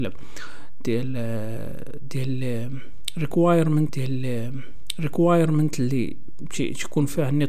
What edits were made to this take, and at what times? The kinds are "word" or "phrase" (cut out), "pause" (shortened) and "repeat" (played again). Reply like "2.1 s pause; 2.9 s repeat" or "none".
3.9 s repeat